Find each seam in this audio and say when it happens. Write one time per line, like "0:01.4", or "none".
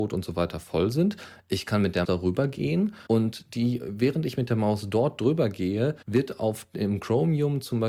0:02.0
0:03.1
0:06.0